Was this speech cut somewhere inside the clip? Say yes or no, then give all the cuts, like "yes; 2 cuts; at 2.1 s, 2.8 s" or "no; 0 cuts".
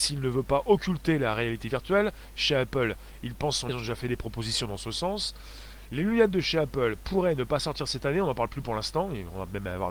yes; 1 cut; at 3.7 s